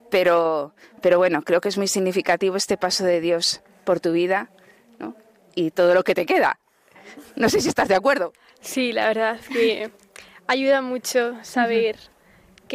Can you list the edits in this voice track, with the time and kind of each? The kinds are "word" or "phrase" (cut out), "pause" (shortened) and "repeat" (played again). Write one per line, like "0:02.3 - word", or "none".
none